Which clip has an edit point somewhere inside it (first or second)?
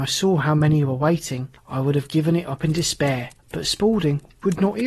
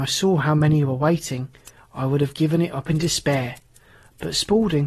first